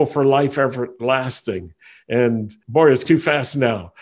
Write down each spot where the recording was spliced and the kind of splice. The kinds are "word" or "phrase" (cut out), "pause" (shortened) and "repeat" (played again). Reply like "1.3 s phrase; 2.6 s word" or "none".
2.6 s word; 3.0 s word

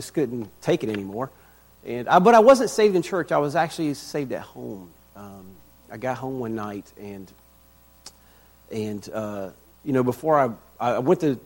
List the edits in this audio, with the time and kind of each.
none

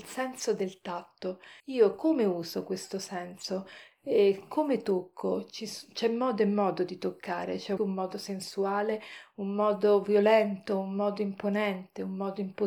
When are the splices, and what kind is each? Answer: 1.6 s pause; 7.8 s phrase

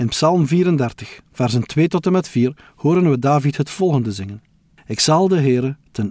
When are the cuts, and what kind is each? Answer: none

